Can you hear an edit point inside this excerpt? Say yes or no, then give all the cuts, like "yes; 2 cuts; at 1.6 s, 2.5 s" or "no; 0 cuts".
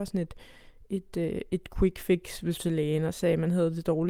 yes; 1 cut; at 2.6 s